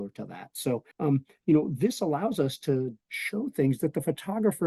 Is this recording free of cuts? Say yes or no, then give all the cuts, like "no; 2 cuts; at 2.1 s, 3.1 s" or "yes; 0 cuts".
no; 2 cuts; at 0.9 s, 3.0 s